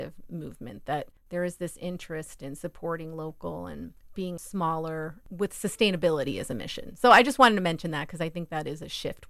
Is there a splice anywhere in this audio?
no; 0 cuts

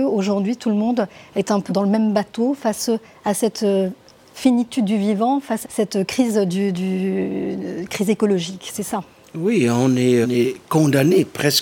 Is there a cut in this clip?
yes; 3 cuts; at 1.7 s, 5.6 s, 10.2 s

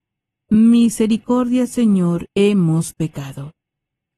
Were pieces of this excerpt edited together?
yes; 1 cut; at 2.3 s

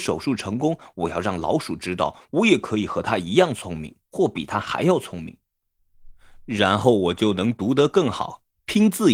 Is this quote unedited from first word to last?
no; 1 cut; at 4.0 s

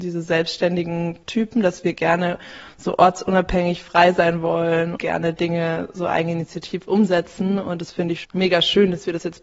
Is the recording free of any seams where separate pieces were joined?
no; 3 cuts; at 1.2 s, 5.0 s, 8.2 s

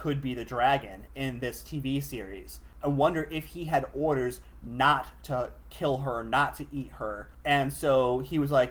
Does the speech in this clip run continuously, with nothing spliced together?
yes; 0 cuts

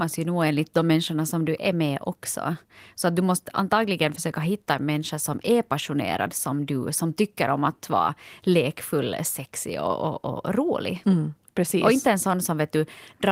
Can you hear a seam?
no; 0 cuts

